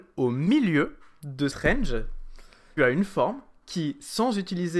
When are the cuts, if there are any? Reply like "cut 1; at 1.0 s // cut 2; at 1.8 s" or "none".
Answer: cut 1; at 1.5 s // cut 2; at 2.8 s